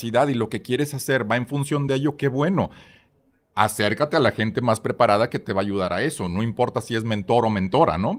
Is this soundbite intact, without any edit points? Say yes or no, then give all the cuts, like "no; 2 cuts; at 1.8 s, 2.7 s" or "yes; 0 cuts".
yes; 0 cuts